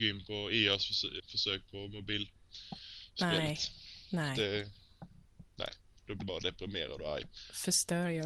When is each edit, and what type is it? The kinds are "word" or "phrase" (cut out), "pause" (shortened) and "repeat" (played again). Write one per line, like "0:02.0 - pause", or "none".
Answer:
0:01.2 - word
0:06.2 - word

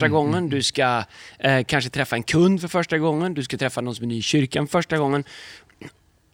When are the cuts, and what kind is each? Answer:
none

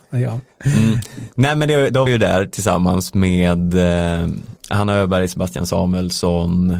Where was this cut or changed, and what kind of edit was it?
0:02.1 - word
0:04.6 - pause

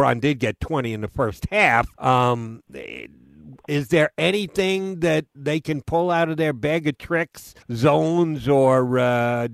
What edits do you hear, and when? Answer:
0:01.9 - pause
0:07.6 - pause

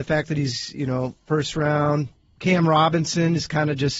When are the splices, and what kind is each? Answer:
none

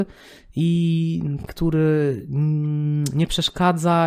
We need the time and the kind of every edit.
0:01.5 - word

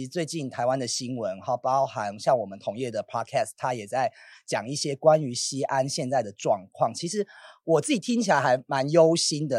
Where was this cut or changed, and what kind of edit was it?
none

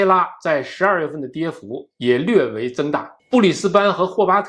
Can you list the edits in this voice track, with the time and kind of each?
0:03.2 - pause

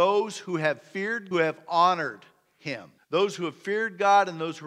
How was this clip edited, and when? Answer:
0:01.3 - phrase
0:03.0 - pause

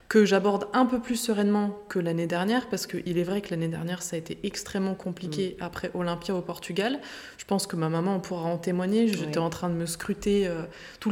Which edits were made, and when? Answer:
none

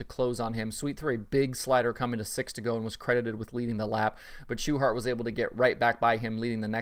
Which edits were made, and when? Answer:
none

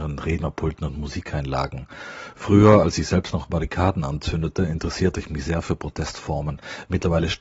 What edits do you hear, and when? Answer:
none

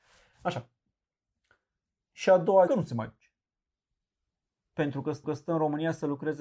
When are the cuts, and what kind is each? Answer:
0:02.7 - phrase
0:05.2 - repeat

